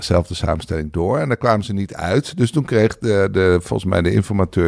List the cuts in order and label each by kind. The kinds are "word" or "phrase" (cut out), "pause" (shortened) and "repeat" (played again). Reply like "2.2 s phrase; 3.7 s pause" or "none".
none